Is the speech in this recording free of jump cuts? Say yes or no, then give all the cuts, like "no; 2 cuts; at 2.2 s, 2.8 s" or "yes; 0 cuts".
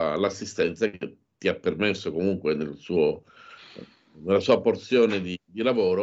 yes; 0 cuts